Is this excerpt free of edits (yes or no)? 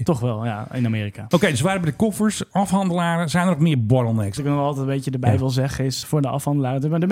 yes